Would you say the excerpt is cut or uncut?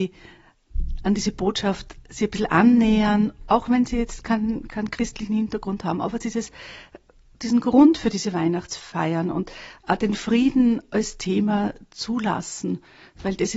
uncut